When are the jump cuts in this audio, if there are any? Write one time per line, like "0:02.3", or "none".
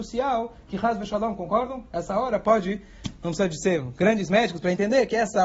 none